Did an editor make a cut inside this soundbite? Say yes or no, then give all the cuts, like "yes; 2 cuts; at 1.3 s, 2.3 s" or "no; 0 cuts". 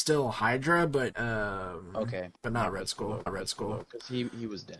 yes; 3 cuts; at 1.1 s, 2.4 s, 3.3 s